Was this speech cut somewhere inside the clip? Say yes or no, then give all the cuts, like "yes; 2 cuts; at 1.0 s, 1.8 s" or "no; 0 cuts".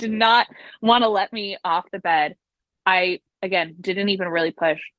no; 0 cuts